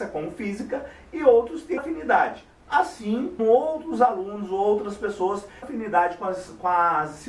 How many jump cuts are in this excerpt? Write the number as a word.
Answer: three